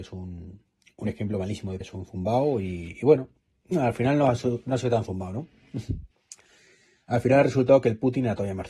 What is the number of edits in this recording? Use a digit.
2